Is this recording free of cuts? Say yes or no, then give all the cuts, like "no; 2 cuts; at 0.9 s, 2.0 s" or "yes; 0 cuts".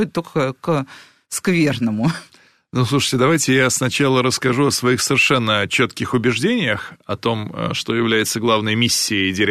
yes; 0 cuts